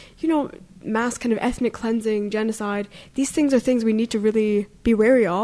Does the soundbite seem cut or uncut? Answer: uncut